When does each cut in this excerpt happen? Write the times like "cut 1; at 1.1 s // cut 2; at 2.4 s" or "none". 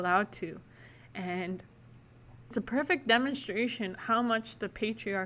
cut 1; at 2.5 s // cut 2; at 4.0 s